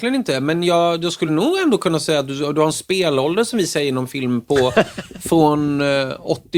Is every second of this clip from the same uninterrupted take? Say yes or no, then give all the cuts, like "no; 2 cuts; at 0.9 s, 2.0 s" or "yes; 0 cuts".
yes; 0 cuts